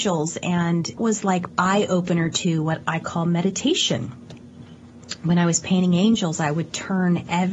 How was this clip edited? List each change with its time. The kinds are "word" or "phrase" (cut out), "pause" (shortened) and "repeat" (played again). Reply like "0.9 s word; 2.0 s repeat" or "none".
1.0 s word; 1.5 s word